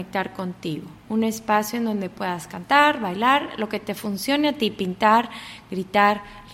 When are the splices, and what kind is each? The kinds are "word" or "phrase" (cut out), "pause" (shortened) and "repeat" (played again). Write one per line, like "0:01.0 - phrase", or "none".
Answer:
0:01.0 - pause